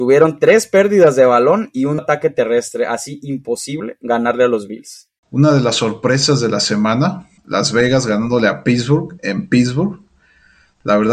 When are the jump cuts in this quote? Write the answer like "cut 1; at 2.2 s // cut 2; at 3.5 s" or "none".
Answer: cut 1; at 2.0 s // cut 2; at 5.2 s // cut 3; at 7.4 s